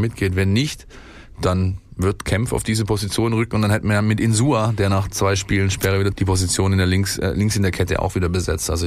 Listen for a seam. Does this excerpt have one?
yes; 1 cut; at 6.1 s

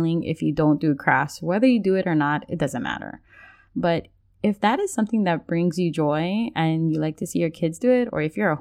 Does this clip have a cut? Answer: no; 0 cuts

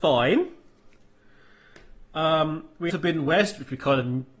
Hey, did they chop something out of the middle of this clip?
yes; 1 cut; at 2.9 s

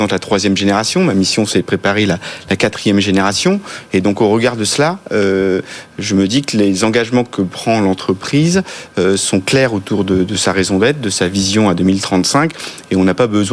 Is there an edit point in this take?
no; 0 cuts

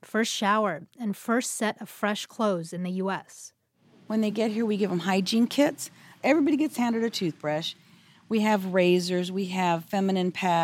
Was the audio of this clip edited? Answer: no; 0 cuts

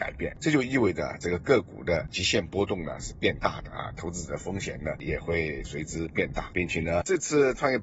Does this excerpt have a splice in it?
no; 0 cuts

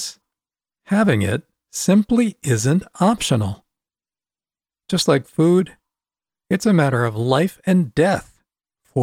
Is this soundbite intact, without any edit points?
yes; 0 cuts

